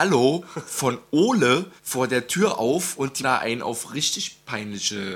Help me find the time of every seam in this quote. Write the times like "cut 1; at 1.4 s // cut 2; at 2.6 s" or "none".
cut 1; at 1.8 s // cut 2; at 3.2 s